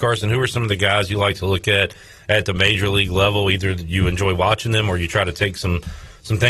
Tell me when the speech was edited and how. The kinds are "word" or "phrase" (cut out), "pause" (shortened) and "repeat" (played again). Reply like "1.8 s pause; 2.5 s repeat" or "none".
none